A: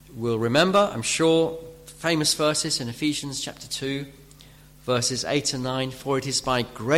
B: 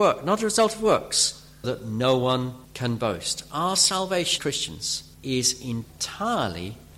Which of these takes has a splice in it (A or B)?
B